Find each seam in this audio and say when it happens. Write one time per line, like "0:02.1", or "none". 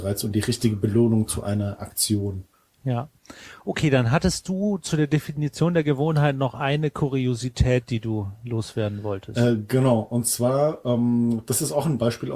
0:02.5